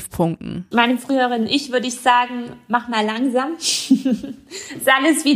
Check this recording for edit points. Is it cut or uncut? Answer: uncut